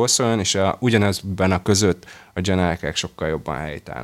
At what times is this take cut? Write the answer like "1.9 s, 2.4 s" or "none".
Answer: 1.6 s